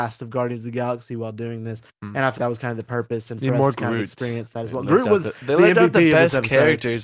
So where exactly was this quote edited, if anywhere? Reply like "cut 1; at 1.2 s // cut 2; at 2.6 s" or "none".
cut 1; at 2.4 s